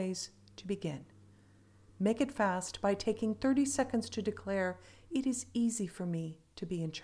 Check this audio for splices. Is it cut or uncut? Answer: uncut